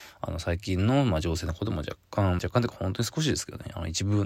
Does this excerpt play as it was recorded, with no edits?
yes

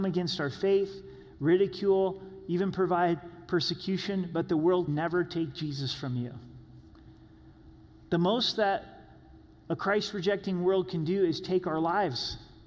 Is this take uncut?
no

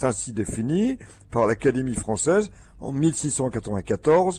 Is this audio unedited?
yes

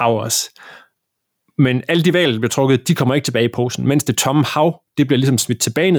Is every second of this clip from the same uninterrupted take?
yes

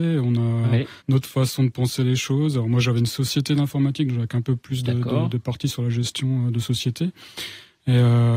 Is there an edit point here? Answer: yes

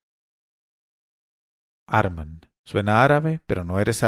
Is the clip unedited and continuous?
no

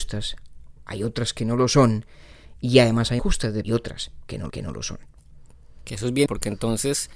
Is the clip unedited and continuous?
no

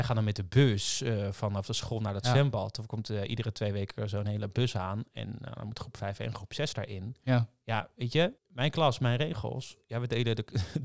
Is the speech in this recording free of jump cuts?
no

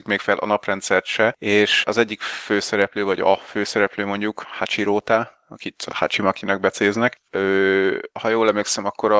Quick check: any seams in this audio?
no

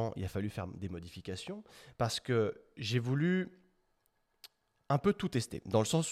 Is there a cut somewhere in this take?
no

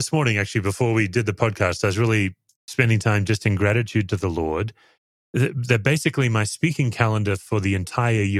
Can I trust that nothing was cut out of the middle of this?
yes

